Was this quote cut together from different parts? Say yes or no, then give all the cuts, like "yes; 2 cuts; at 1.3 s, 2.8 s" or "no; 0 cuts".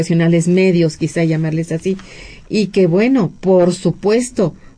no; 0 cuts